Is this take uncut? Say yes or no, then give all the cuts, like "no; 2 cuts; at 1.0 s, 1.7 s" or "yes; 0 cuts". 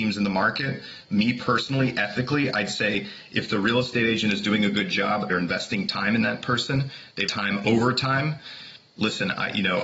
no; 2 cuts; at 5.3 s, 7.3 s